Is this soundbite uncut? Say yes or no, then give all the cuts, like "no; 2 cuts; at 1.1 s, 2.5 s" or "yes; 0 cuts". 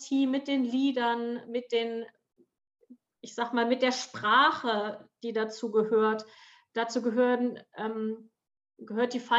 yes; 0 cuts